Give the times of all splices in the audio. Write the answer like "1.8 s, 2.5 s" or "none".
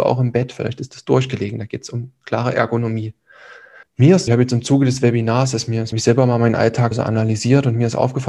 3.8 s, 4.3 s, 5.9 s, 6.9 s